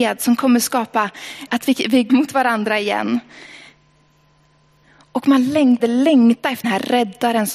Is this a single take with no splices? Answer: no; 4 cuts; at 1.5 s, 2.1 s, 5.8 s, 6.6 s

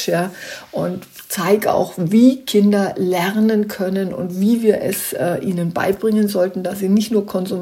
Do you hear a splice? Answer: no; 0 cuts

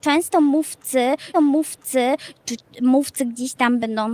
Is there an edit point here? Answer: yes; 1 cut; at 1.3 s

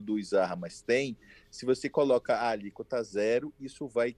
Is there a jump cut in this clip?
no; 0 cuts

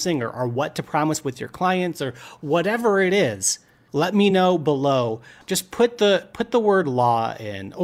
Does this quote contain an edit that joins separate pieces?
no; 0 cuts

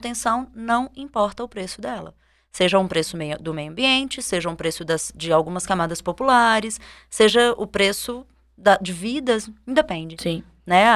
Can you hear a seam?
no; 0 cuts

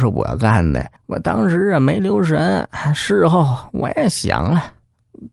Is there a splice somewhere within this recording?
yes; 1 cut; at 1.0 s

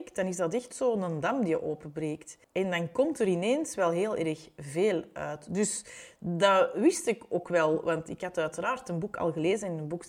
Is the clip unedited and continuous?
no; 1 cut; at 2.4 s

